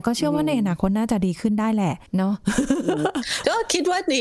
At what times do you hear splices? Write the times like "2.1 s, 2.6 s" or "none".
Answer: 2.1 s